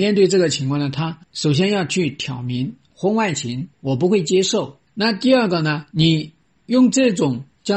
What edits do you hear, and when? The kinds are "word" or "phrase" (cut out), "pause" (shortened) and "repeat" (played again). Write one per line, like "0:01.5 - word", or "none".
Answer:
0:01.2 - pause
0:03.7 - pause
0:04.9 - pause